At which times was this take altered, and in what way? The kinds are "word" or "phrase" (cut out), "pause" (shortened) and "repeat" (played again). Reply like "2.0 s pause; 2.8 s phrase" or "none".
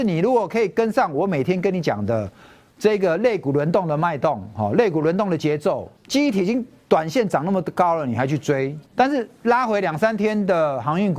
6.0 s pause; 8.9 s pause